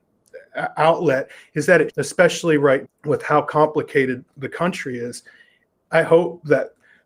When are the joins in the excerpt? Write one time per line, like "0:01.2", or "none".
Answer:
0:01.9
0:02.8